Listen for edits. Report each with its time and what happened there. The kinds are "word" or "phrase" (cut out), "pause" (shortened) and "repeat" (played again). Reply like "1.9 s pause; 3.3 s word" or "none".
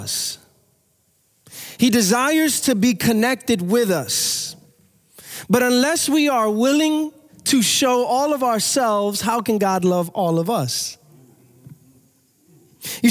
none